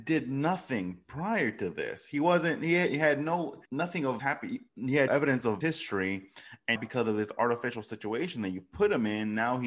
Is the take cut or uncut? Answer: cut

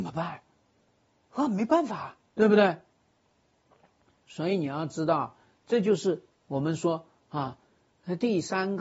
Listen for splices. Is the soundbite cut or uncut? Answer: uncut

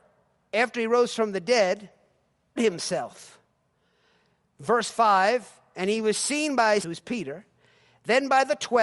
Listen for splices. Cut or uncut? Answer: cut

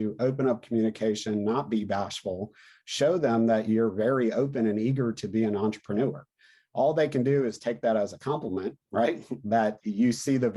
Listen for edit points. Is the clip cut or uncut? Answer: uncut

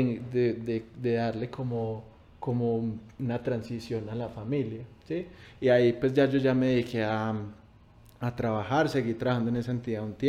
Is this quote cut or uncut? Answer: uncut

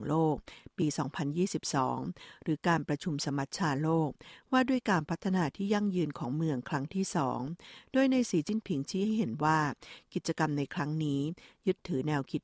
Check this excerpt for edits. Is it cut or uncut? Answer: uncut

